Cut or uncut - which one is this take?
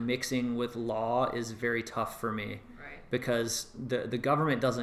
uncut